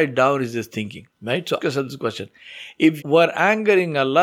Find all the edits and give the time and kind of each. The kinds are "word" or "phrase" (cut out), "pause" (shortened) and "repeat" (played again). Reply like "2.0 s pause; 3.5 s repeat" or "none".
1.1 s pause; 1.6 s word; 3.0 s word